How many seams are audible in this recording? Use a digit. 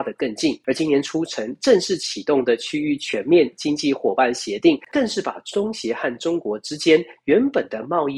1